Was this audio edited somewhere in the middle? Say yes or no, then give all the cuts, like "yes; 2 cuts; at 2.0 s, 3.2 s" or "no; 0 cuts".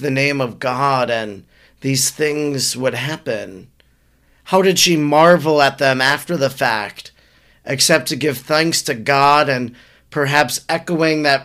no; 0 cuts